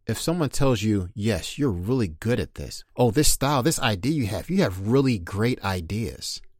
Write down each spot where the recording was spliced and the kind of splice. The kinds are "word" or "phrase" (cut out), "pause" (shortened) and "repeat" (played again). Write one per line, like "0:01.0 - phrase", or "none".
0:02.9 - pause

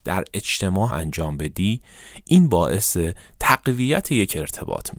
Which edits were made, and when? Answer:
0:00.9 - word

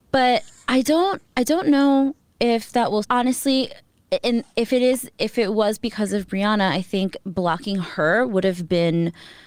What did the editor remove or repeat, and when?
0:03.0 - word

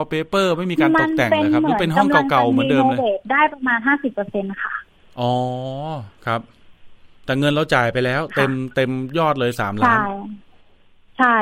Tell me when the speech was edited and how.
none

